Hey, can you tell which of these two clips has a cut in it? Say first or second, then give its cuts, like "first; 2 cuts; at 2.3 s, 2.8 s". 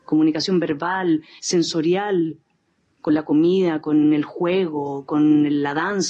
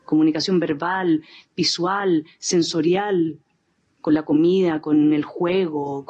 first; 1 cut; at 1.4 s